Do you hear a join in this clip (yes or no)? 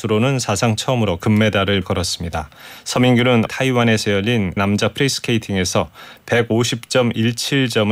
yes